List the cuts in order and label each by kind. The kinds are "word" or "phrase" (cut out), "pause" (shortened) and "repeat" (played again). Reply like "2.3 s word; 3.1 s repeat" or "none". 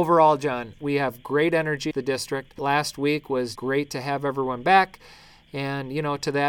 1.9 s word; 2.6 s word; 3.6 s word